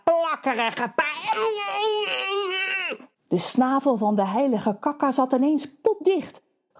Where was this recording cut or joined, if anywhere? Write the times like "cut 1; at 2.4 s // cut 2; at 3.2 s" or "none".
cut 1; at 3.1 s